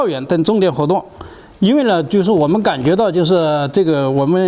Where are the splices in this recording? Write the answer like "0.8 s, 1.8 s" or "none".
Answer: none